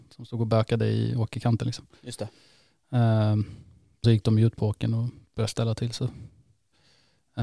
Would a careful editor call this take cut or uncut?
cut